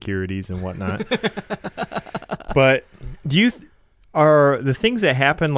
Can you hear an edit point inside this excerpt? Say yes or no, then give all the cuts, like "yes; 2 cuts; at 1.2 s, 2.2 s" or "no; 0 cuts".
no; 0 cuts